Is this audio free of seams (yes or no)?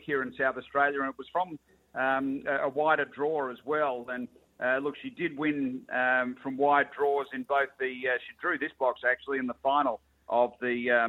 yes